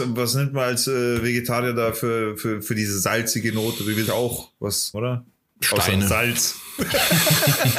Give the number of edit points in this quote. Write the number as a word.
two